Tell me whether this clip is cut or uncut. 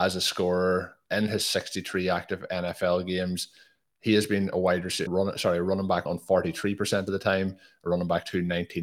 cut